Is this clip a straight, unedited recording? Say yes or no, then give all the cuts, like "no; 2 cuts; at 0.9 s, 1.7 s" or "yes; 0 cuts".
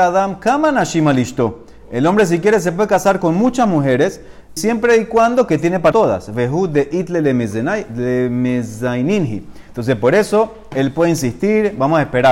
no; 2 cuts; at 4.6 s, 5.9 s